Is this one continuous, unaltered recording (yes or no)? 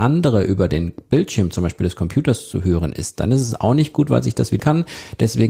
no